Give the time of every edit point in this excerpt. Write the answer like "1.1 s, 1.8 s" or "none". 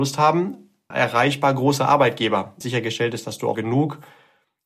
0.9 s, 2.6 s, 3.5 s